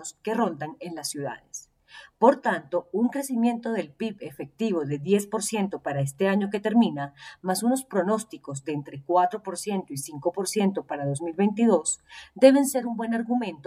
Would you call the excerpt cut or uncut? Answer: uncut